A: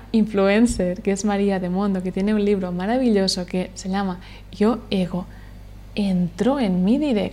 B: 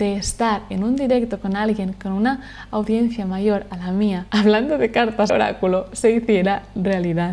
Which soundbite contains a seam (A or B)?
B